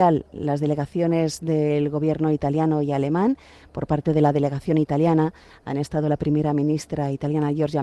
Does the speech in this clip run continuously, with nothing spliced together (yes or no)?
yes